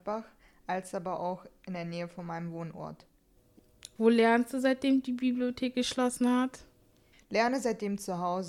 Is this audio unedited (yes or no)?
yes